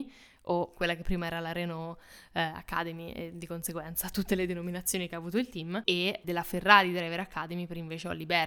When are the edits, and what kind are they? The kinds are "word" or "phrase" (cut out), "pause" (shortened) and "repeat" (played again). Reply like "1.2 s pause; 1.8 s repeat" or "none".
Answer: 6.2 s word